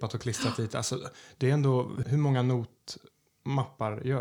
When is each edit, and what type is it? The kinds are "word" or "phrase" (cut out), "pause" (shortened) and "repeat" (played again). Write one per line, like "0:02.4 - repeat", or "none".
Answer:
0:02.0 - word